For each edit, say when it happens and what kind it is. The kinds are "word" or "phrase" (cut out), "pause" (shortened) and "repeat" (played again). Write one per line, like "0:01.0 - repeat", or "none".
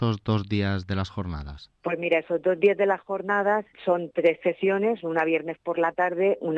none

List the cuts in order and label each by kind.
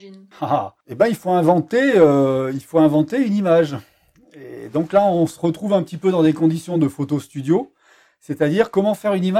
none

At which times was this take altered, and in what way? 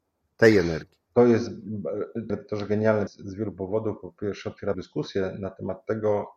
0:01.1 - pause
0:02.3 - phrase
0:03.1 - word
0:04.7 - phrase

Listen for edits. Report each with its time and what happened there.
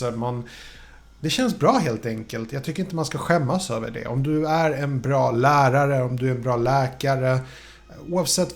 none

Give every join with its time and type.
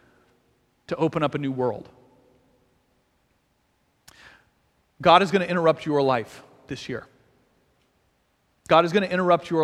none

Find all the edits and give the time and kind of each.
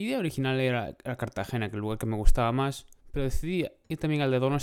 0:03.0 - pause

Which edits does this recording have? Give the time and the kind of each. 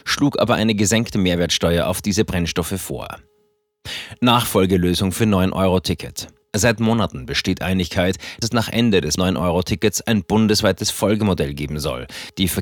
0:06.4 - pause
0:08.4 - word
0:09.2 - word

